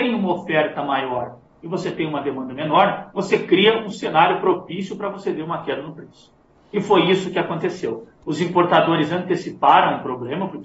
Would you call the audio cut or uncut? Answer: uncut